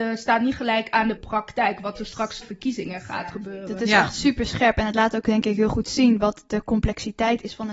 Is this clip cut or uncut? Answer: cut